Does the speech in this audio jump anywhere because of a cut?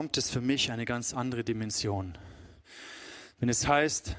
no; 0 cuts

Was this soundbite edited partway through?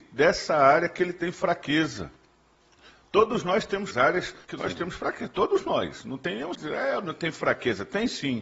yes; 3 cuts; at 3.9 s, 4.4 s, 6.5 s

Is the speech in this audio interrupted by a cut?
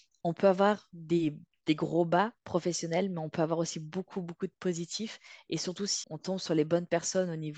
yes; 2 cuts; at 2.4 s, 6.0 s

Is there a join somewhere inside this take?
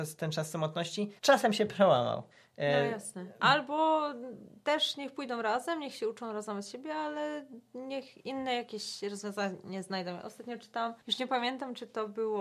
yes; 3 cuts; at 1.2 s, 2.3 s, 11.0 s

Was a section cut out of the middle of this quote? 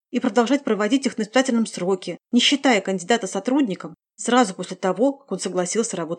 yes; 1 cut; at 2.2 s

